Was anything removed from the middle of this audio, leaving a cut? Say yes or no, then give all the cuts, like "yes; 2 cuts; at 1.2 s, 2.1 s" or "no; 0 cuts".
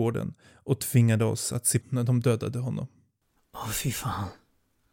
yes; 1 cut; at 1.8 s